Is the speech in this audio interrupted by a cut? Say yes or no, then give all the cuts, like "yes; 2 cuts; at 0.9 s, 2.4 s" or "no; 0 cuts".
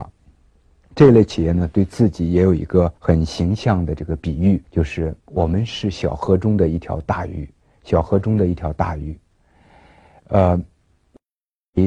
yes; 4 cuts; at 3.0 s, 4.6 s, 5.2 s, 7.6 s